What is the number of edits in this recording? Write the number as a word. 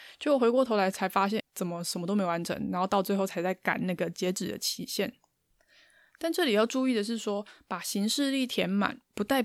one